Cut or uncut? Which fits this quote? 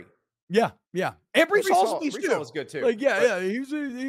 uncut